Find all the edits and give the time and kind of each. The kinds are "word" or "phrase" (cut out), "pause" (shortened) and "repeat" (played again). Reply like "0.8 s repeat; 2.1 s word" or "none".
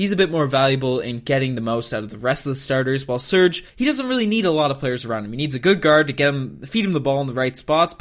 3.7 s pause